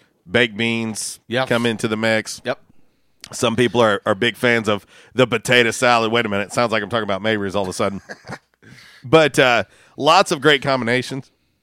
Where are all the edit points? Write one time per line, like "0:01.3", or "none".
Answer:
none